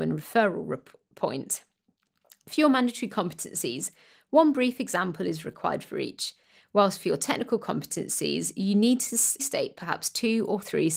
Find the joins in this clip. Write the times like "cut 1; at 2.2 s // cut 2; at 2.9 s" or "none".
cut 1; at 9.4 s